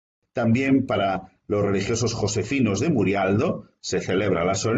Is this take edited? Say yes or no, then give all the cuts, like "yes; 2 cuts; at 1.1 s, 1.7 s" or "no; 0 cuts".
no; 0 cuts